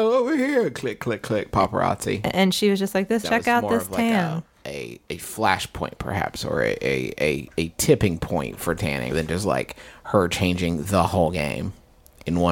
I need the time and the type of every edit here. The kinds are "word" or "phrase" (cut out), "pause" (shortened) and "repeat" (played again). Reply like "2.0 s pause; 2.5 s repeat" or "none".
3.2 s phrase; 9.1 s word